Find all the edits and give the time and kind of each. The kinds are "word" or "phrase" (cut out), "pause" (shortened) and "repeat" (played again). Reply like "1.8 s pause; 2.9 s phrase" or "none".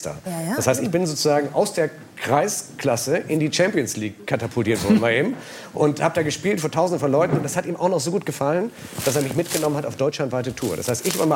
none